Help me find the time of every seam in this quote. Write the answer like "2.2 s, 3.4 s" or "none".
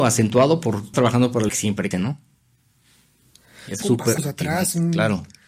0.9 s, 1.5 s, 1.9 s, 3.8 s, 4.2 s